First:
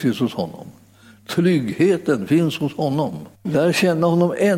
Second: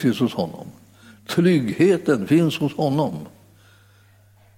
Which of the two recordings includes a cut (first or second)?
first